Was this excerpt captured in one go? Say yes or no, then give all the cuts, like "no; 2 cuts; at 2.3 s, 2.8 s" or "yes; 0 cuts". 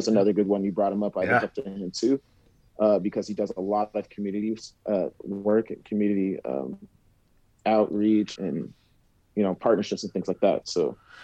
no; 1 cut; at 8.4 s